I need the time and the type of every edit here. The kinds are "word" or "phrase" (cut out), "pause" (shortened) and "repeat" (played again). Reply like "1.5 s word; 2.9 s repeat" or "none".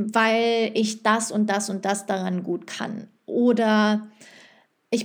none